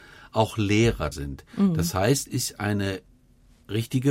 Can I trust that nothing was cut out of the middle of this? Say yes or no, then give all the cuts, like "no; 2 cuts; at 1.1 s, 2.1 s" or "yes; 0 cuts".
no; 2 cuts; at 1.1 s, 2.3 s